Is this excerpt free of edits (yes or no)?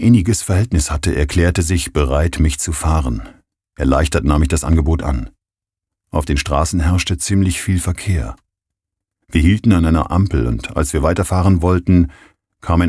yes